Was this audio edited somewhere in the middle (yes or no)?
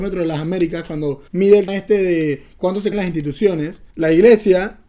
yes